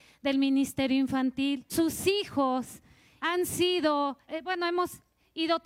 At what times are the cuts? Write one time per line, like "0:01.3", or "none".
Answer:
0:01.7
0:03.2
0:04.3